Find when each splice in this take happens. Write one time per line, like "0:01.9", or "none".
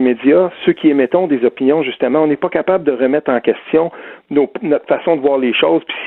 0:04.9